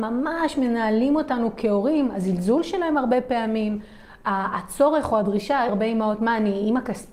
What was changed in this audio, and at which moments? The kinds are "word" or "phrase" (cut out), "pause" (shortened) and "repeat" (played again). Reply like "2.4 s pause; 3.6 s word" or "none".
5.7 s phrase